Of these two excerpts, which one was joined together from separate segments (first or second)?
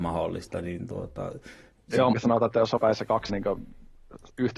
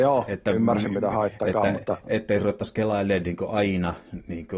first